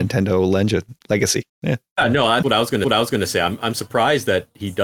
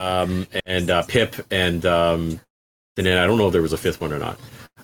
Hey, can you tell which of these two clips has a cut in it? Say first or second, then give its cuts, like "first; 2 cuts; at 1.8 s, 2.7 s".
first; 3 cuts; at 1.5 s, 2.4 s, 2.8 s